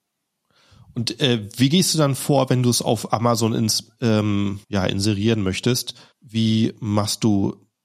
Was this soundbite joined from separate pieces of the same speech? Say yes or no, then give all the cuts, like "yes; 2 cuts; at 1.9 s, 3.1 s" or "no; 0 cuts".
yes; 2 cuts; at 4.6 s, 6.1 s